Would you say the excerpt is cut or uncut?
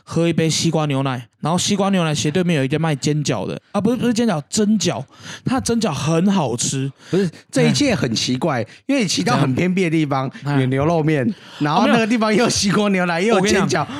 cut